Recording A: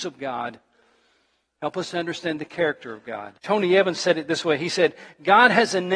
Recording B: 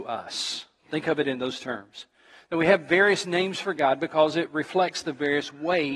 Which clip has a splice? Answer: A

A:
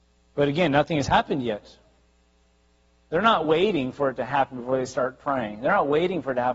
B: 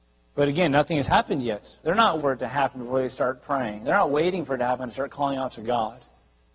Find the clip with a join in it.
B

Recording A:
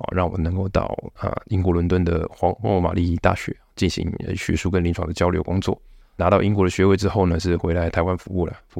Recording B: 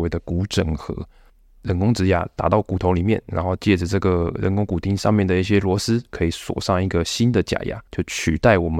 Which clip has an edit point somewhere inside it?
B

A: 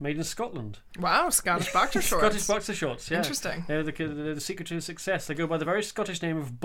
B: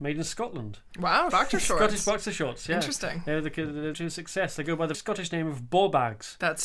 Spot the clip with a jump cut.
B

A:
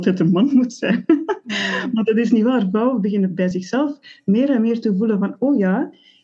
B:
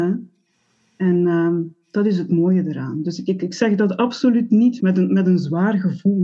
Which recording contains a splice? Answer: B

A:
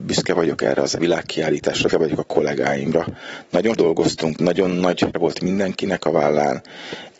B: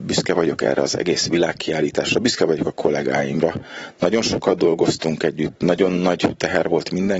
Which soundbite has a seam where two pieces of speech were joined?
A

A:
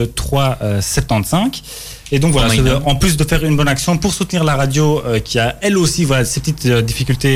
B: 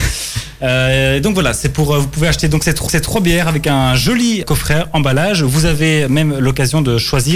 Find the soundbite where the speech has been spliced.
B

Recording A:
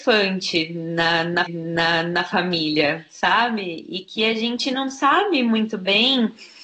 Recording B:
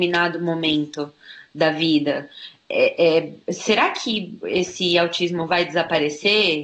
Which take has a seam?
A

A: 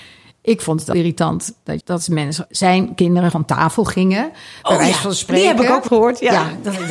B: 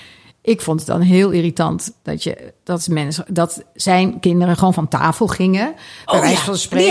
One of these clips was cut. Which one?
A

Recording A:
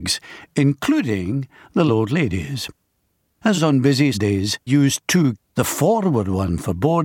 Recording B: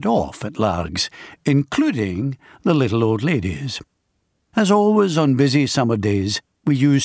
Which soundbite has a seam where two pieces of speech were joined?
A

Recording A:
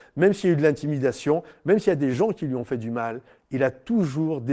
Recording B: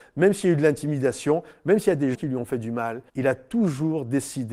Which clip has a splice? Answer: B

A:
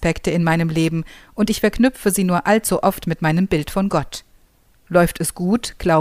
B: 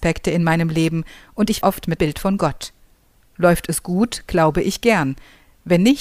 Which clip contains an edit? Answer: B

